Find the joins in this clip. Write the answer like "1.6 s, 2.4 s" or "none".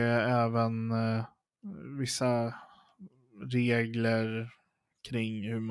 none